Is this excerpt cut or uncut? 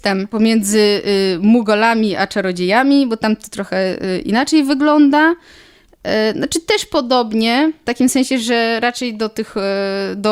uncut